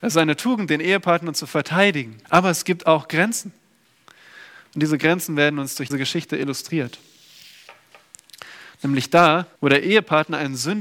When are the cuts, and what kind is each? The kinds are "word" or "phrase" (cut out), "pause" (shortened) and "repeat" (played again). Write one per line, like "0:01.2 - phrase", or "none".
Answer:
0:02.2 - pause
0:05.9 - word
0:09.6 - pause